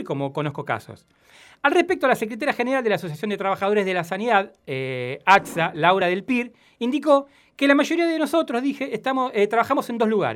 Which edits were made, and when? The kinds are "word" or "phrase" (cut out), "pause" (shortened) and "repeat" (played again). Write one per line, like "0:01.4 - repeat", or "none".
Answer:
none

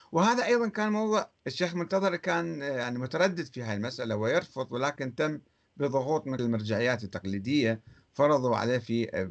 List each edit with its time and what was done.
0:01.4 - pause
0:06.4 - word

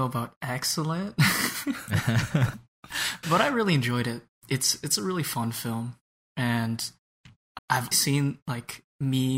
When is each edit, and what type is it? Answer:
0:03.2 - word
0:07.6 - word
0:07.9 - word

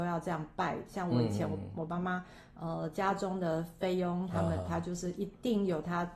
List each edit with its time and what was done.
none

